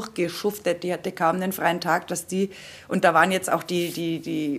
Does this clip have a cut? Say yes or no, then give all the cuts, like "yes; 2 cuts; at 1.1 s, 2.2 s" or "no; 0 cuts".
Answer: no; 0 cuts